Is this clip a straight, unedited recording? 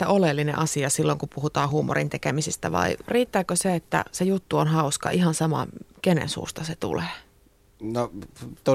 yes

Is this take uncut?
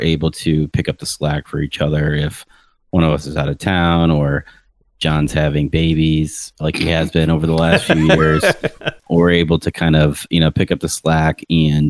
yes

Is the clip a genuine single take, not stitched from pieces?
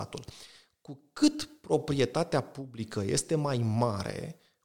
yes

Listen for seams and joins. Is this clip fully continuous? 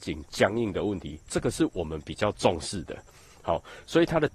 yes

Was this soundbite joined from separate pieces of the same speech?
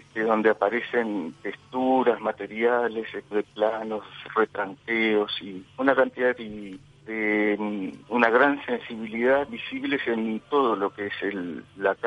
yes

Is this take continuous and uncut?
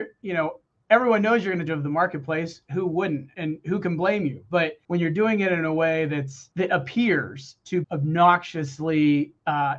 no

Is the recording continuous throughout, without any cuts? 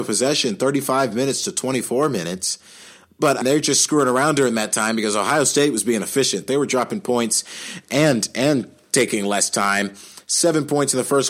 no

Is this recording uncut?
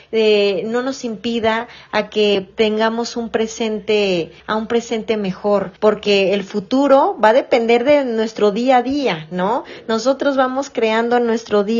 no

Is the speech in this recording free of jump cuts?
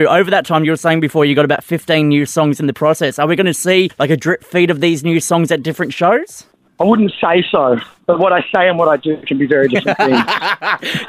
yes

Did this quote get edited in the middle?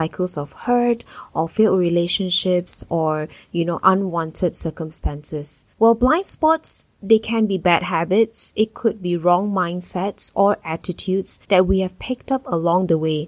yes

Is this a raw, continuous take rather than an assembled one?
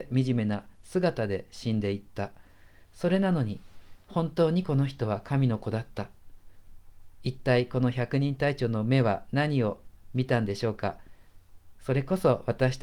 yes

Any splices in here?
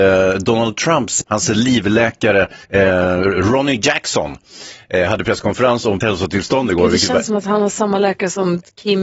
yes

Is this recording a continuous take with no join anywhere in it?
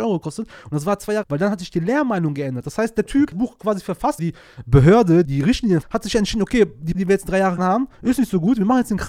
no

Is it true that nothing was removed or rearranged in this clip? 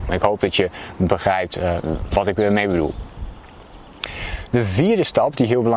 yes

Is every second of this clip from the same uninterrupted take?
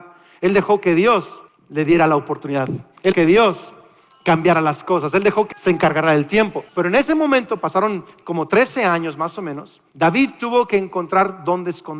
no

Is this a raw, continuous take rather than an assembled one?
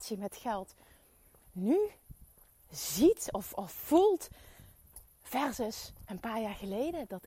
yes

